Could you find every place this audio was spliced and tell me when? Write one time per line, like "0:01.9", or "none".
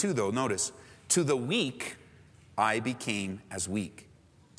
none